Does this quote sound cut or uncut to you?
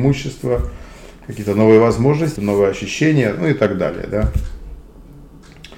cut